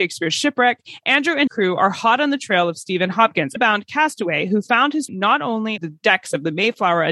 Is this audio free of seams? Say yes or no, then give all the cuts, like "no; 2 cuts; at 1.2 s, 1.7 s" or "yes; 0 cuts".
no; 4 cuts; at 1.5 s, 3.6 s, 5.1 s, 5.8 s